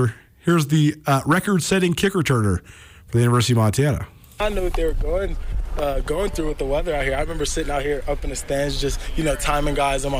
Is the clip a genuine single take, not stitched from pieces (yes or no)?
yes